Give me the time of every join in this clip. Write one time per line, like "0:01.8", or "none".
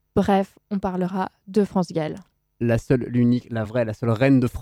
none